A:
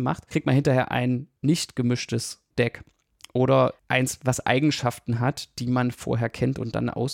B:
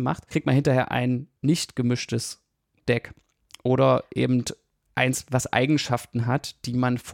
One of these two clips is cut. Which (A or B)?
A